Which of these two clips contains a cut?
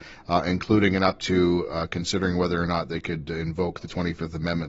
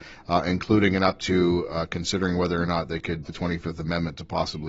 second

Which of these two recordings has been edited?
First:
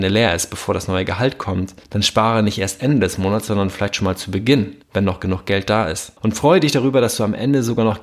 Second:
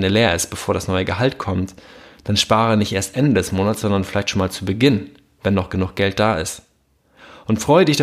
first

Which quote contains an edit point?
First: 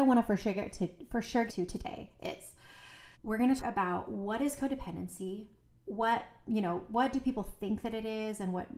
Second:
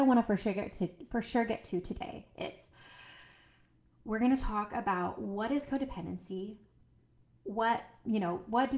first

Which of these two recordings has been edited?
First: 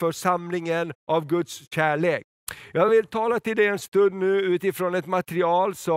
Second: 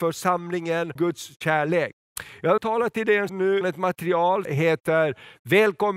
second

